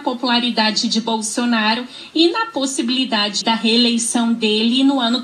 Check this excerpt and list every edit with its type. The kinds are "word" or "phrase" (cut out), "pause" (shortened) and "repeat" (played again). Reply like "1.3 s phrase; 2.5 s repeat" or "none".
3.4 s word